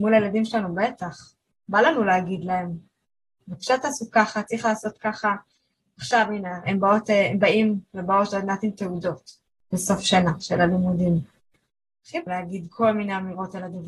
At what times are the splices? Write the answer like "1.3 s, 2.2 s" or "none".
12.3 s